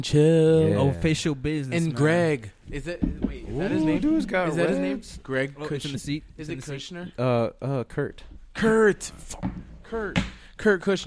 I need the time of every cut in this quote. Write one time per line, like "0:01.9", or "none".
none